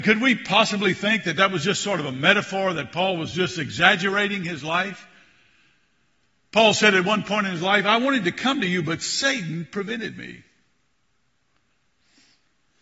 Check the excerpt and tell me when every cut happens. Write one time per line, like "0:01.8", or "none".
none